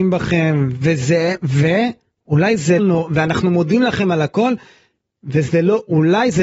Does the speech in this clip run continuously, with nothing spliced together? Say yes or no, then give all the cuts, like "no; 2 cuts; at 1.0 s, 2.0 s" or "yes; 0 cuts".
no; 1 cut; at 2.8 s